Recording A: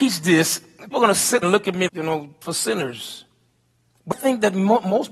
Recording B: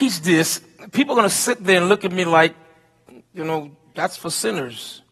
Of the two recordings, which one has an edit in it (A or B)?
A